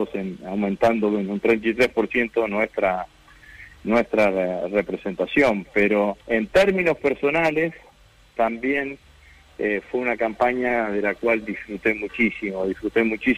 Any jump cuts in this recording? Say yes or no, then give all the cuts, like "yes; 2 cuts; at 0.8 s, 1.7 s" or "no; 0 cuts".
yes; 1 cut; at 6.2 s